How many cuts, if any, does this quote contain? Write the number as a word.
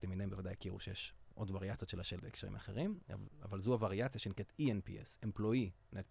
one